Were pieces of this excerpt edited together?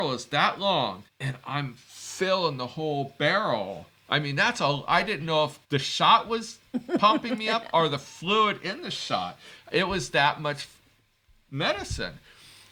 yes; 2 cuts; at 1.1 s, 5.6 s

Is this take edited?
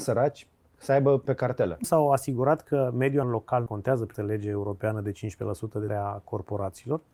yes; 6 cuts; at 1.2 s, 1.8 s, 3.2 s, 3.7 s, 4.1 s, 5.9 s

